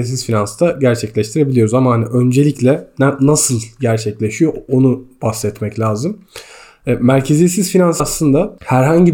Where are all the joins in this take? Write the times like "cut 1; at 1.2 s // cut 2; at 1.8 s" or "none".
cut 1; at 8.0 s